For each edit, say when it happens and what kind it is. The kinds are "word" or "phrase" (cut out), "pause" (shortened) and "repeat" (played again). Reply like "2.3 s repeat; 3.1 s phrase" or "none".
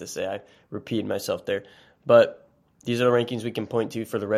2.8 s word